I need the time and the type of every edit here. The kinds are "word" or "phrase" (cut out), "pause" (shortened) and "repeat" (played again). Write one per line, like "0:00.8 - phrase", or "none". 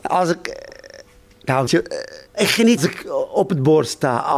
0:01.7 - word
0:02.3 - pause
0:02.8 - phrase